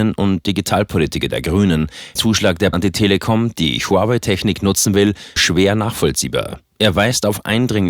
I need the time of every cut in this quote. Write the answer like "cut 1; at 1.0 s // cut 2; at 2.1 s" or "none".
cut 1; at 2.2 s // cut 2; at 2.7 s // cut 3; at 5.4 s